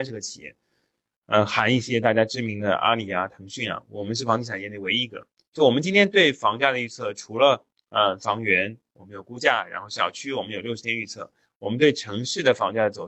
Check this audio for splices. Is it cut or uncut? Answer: uncut